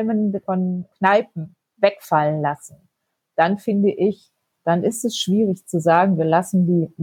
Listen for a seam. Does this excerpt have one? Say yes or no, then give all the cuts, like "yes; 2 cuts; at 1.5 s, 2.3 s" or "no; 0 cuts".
no; 0 cuts